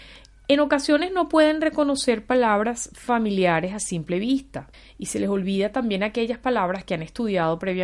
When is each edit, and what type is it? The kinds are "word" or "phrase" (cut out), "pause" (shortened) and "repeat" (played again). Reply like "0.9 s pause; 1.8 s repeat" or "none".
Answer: 4.7 s pause